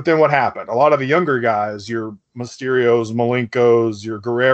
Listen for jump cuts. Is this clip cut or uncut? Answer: uncut